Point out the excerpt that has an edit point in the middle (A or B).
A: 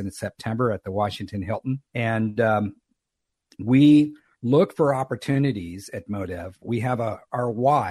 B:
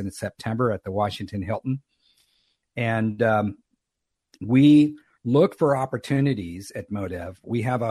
A